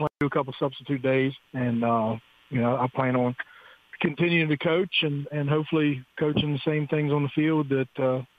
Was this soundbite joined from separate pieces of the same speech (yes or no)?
yes